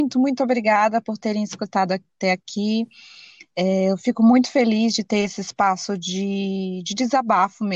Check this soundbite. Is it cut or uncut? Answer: uncut